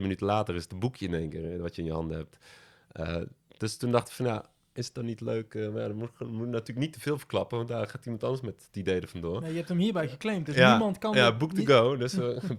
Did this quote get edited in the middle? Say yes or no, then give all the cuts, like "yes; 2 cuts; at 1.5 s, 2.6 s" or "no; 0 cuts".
no; 0 cuts